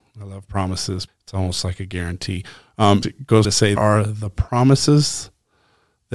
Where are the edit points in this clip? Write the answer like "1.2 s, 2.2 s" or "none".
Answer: 1.1 s, 3.0 s, 3.4 s, 3.8 s